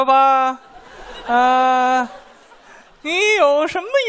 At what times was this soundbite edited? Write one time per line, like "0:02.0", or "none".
none